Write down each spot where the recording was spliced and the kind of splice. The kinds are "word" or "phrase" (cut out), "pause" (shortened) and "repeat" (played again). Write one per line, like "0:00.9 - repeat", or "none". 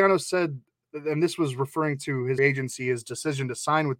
0:02.4 - word